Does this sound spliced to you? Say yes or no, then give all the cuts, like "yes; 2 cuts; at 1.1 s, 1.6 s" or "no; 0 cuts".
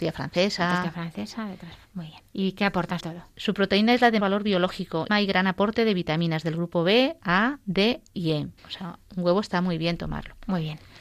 yes; 5 cuts; at 1.8 s, 3.0 s, 4.2 s, 5.1 s, 8.6 s